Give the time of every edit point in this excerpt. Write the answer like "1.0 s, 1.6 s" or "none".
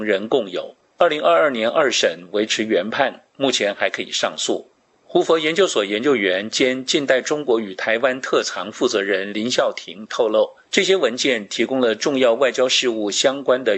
none